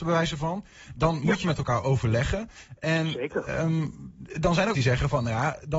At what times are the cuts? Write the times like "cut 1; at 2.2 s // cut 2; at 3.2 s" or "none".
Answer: cut 1; at 1.4 s // cut 2; at 4.7 s